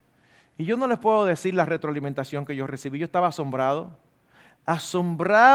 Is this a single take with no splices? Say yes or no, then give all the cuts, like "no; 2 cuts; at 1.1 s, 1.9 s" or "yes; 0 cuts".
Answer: yes; 0 cuts